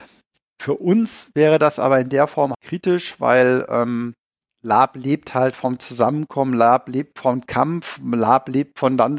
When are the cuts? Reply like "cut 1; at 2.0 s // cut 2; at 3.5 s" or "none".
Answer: cut 1; at 2.5 s